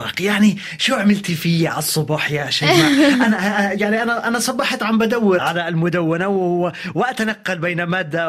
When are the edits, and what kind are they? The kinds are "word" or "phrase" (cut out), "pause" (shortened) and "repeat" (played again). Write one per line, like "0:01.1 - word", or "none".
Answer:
0:05.4 - word